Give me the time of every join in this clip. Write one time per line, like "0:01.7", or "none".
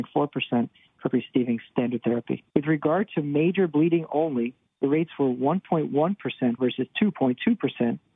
0:01.1
0:02.5
0:04.7
0:06.6